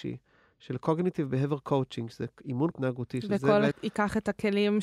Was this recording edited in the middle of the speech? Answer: yes; 2 cuts; at 2.7 s, 3.7 s

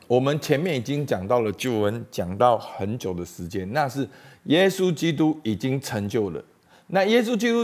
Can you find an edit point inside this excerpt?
no; 0 cuts

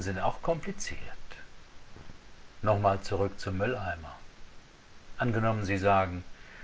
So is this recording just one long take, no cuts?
yes; 0 cuts

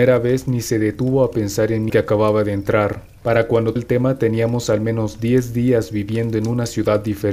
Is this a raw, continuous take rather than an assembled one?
no; 2 cuts; at 1.9 s, 3.8 s

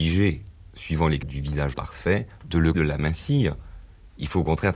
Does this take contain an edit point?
yes; 3 cuts; at 1.2 s, 1.7 s, 2.7 s

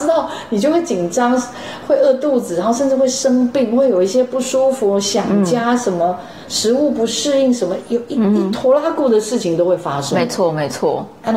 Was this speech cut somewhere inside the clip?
no; 0 cuts

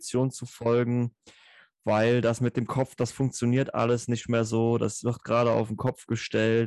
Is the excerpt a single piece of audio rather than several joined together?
yes; 0 cuts

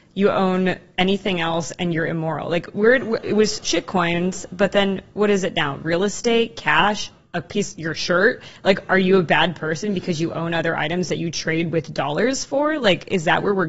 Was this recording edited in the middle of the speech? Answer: no; 0 cuts

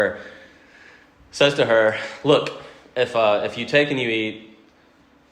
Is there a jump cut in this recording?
no; 0 cuts

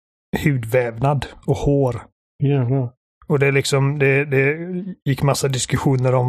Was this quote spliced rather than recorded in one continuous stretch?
no; 0 cuts

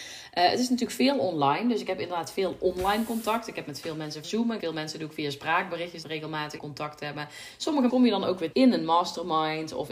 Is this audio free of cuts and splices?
no; 6 cuts; at 4.2 s, 4.6 s, 6.0 s, 6.6 s, 7.9 s, 8.5 s

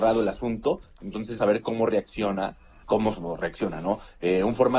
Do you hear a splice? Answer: yes; 2 cuts; at 1.4 s, 2.8 s

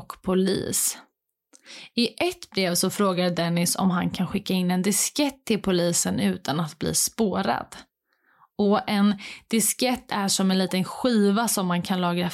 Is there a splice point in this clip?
no; 0 cuts

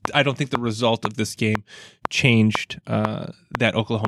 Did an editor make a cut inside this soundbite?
no; 0 cuts

